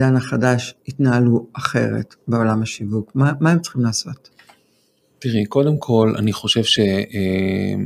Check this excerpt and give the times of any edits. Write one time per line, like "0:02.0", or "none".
none